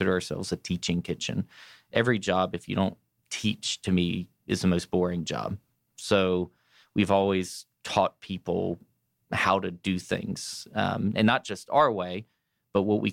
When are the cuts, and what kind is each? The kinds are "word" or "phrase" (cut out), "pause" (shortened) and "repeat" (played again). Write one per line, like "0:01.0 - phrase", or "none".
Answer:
none